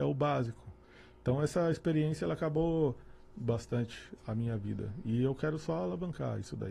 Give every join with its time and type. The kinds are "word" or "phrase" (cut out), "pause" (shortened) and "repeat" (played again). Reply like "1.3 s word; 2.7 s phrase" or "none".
3.3 s word; 4.2 s word